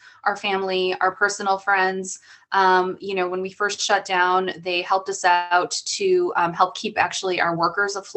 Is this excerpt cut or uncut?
uncut